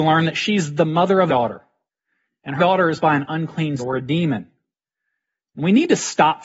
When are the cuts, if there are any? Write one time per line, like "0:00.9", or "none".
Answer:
0:01.3
0:02.6
0:03.0
0:03.8